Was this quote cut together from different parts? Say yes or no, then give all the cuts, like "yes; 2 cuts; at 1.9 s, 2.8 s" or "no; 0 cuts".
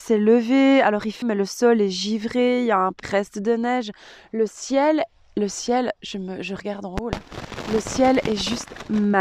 yes; 2 cuts; at 1.2 s, 3.0 s